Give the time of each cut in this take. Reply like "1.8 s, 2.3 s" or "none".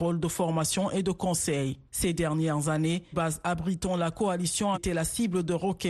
3.1 s, 4.7 s